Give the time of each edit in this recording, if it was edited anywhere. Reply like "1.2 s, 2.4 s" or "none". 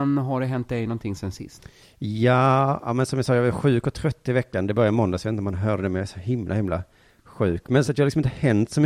1.8 s, 7.8 s